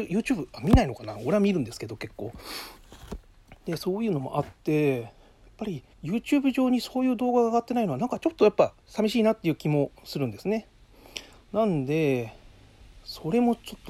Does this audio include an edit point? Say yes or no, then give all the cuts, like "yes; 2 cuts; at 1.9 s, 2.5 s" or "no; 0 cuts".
yes; 2 cuts; at 5.9 s, 8.8 s